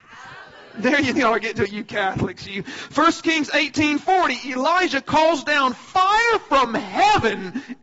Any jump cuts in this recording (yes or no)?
yes